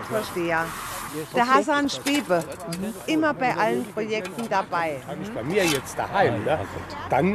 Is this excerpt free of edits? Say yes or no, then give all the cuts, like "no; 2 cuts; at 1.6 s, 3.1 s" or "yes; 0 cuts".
yes; 0 cuts